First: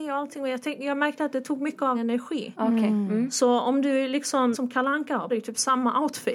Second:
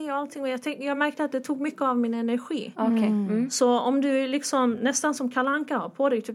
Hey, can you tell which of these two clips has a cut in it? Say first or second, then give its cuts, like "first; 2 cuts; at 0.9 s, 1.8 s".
first; 3 cuts; at 1.9 s, 4.5 s, 5.3 s